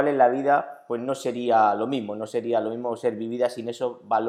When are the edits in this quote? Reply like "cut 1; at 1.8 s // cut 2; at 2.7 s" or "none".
none